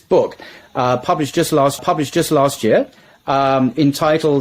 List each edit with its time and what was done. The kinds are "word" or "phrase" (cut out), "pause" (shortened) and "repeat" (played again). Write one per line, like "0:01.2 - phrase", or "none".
0:01.8 - repeat